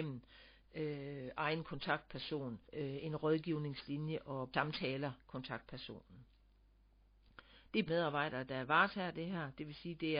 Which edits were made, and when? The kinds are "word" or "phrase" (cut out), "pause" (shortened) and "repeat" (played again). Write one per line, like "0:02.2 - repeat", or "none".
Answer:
0:02.6 - pause
0:05.2 - word
0:07.9 - word